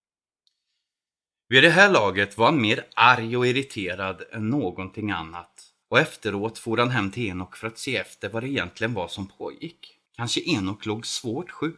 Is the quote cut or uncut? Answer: cut